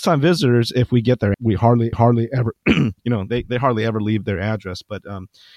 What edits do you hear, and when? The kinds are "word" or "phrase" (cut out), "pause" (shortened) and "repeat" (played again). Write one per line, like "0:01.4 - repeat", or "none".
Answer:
0:01.3 - phrase
0:01.9 - repeat
0:03.0 - pause